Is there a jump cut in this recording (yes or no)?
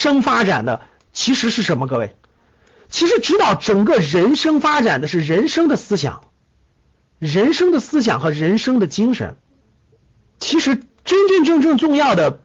yes